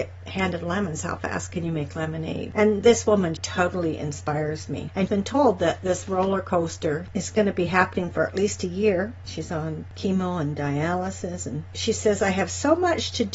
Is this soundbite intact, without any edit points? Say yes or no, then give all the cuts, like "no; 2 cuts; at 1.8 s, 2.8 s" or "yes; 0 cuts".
no; 3 cuts; at 3.4 s, 5.1 s, 7.1 s